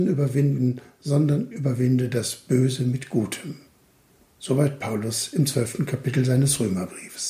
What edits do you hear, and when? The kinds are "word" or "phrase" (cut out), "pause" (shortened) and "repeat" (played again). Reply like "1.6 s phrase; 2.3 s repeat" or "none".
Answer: none